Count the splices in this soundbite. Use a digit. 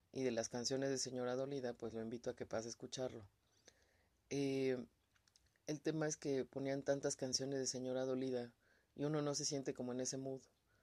0